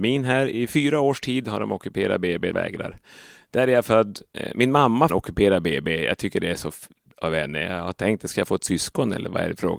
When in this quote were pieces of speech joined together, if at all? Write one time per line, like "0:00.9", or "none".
0:02.5
0:05.1
0:07.1